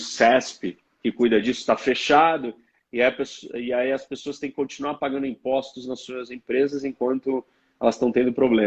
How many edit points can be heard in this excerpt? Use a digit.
0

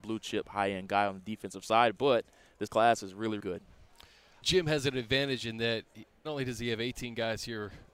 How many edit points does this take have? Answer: 4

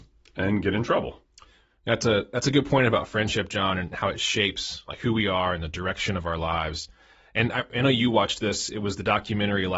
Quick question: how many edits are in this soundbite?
0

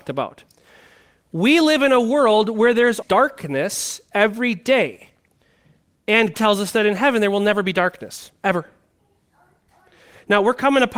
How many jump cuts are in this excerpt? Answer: 2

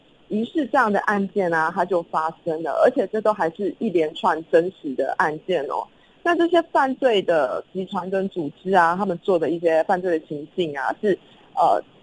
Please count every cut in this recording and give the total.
0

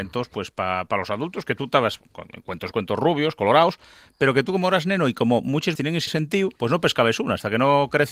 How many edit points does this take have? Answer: 4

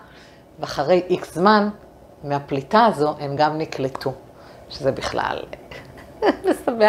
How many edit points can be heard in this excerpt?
0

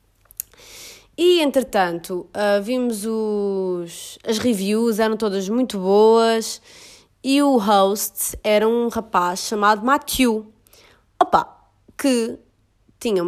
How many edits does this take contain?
0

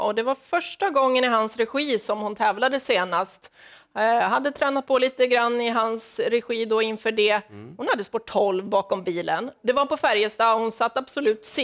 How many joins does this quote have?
0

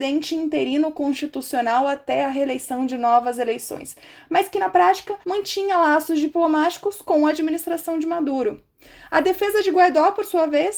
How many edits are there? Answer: 1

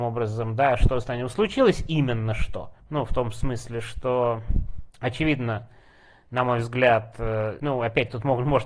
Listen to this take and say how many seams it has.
3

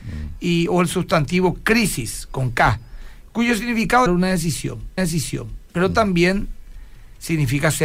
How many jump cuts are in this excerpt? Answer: 2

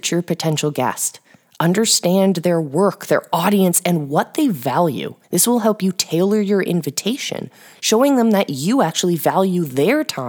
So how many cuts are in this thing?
1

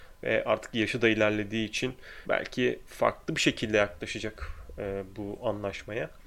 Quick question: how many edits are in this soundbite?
1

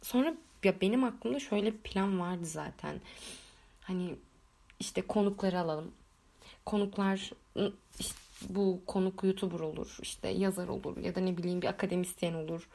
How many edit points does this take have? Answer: 0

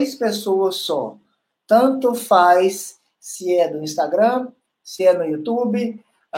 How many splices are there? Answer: 0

